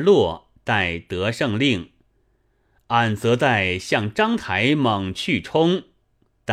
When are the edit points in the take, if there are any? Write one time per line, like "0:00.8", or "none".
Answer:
none